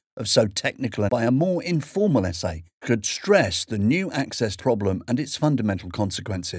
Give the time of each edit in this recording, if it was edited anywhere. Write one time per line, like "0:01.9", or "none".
0:01.1
0:02.8
0:04.6

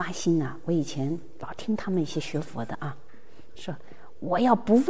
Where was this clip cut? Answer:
0:03.5

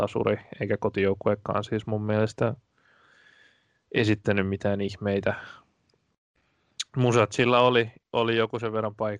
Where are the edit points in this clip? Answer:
none

